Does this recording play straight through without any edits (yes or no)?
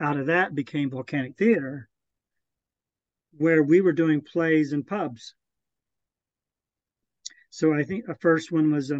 yes